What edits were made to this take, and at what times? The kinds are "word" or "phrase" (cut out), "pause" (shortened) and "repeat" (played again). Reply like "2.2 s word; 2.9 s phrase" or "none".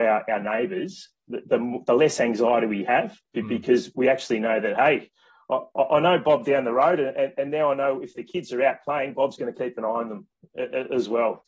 3.2 s pause